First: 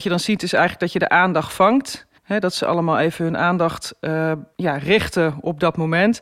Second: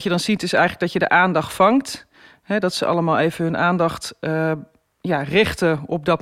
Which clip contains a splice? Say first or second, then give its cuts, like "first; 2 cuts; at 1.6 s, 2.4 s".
first; 2 cuts; at 2.2 s, 4.5 s